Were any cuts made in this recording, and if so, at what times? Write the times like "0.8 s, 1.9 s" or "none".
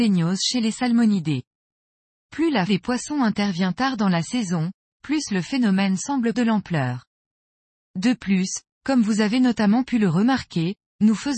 2.7 s, 6.3 s